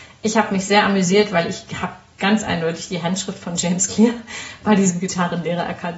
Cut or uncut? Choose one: uncut